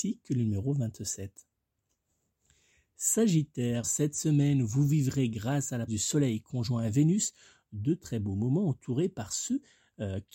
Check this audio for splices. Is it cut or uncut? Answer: cut